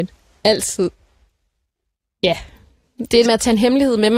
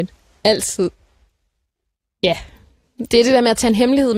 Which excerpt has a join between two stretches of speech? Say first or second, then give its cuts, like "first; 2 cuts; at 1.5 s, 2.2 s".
first; 1 cut; at 3.3 s